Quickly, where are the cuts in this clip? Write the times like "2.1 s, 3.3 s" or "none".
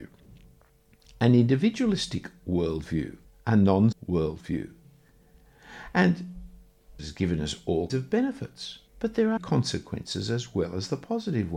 3.2 s, 3.9 s, 7.0 s, 7.9 s, 8.9 s, 9.4 s